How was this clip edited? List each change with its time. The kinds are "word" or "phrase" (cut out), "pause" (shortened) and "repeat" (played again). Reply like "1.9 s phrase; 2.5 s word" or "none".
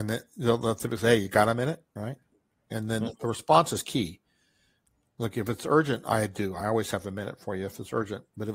none